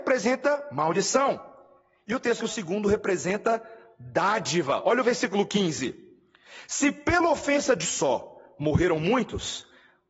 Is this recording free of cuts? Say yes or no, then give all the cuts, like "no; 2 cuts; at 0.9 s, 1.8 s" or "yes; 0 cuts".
no; 2 cuts; at 2.4 s, 7.8 s